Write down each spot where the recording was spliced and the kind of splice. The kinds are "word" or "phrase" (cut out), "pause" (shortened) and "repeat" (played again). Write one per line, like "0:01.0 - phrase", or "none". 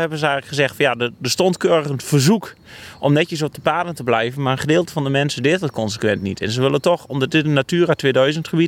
none